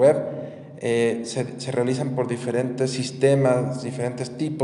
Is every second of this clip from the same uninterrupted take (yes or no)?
yes